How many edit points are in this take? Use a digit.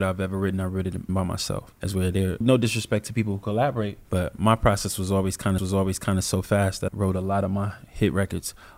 6